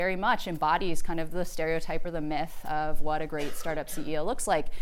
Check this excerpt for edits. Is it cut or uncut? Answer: uncut